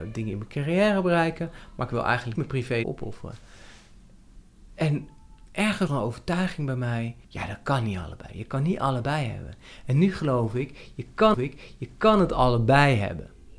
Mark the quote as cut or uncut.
cut